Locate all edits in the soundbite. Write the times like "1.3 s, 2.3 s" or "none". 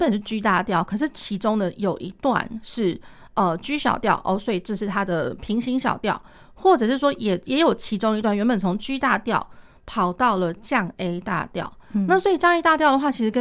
none